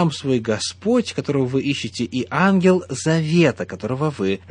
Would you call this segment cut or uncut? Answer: uncut